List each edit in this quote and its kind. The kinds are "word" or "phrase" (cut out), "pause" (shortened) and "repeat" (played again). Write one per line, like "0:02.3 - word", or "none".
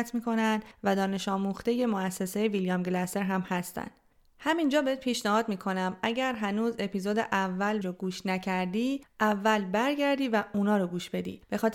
0:07.8 - phrase